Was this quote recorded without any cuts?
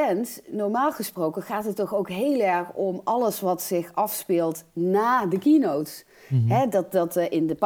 yes; 0 cuts

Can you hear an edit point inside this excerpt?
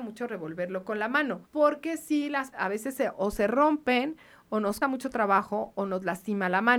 yes; 3 cuts; at 1.4 s, 2.5 s, 4.8 s

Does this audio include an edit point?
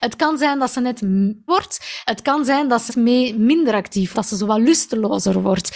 yes; 3 cuts; at 1.5 s, 2.9 s, 4.1 s

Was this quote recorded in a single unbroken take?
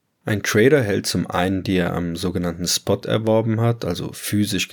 no; 2 cuts; at 1.6 s, 3.0 s

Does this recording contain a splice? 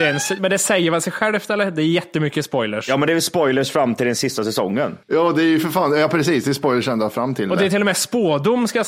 yes; 1 cut; at 5.0 s

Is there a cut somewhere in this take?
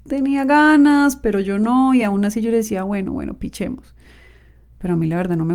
no; 0 cuts

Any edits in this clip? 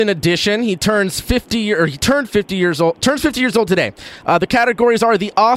no; 0 cuts

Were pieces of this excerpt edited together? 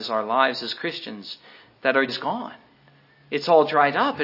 yes; 1 cut; at 2.1 s

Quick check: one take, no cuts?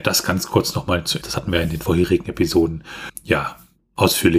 no; 2 cuts; at 1.2 s, 3.1 s

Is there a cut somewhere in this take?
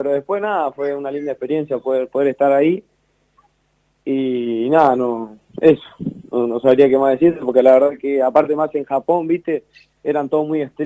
no; 0 cuts

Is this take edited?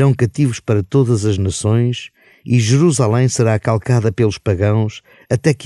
no; 0 cuts

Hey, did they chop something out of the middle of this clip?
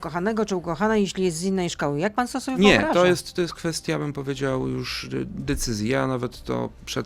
no; 0 cuts

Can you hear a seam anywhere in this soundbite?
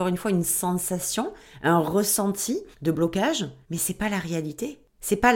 yes; 2 cuts; at 2.7 s, 3.6 s

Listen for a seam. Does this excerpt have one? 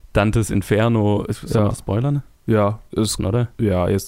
yes; 1 cut; at 3.2 s

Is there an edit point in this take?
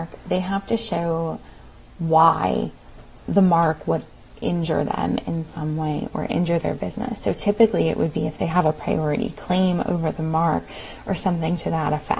no; 0 cuts

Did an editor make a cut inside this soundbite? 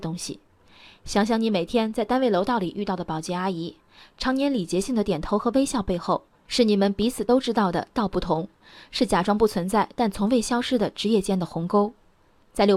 no; 0 cuts

